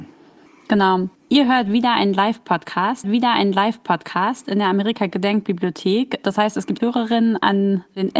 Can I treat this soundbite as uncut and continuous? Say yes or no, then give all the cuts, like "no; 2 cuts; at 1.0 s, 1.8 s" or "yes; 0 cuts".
no; 2 cuts; at 3.0 s, 6.8 s